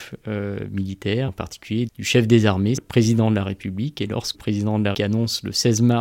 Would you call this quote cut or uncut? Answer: cut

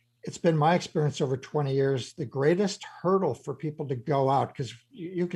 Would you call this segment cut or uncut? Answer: uncut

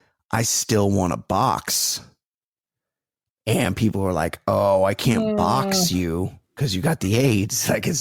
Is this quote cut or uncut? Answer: uncut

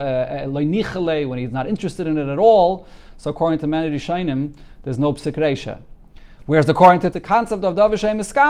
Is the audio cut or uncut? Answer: cut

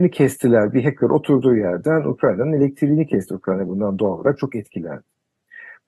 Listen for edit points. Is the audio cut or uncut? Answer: uncut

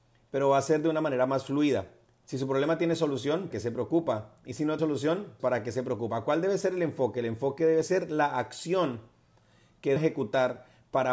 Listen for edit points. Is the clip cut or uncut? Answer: cut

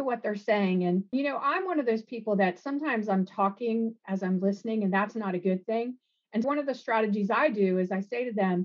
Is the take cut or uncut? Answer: cut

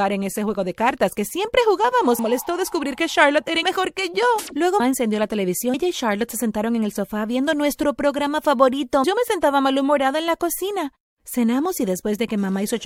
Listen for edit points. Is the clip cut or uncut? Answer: cut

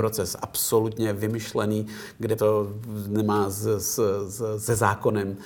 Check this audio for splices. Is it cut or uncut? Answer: cut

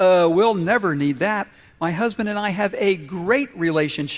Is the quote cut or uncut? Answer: uncut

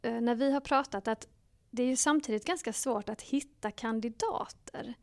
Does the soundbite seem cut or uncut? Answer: uncut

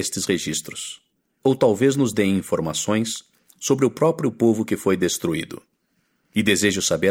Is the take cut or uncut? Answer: uncut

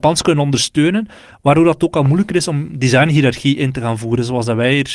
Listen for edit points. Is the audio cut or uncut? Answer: uncut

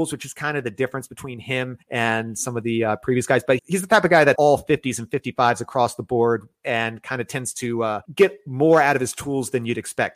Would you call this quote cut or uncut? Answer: cut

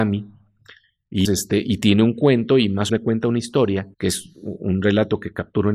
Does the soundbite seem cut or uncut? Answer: cut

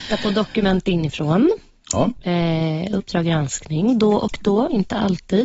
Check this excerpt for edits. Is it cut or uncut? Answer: uncut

